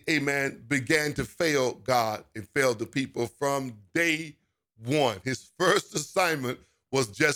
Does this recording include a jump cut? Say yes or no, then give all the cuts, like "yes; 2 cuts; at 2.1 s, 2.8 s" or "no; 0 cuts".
no; 0 cuts